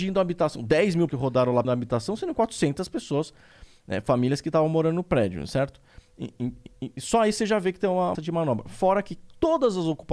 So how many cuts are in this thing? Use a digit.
4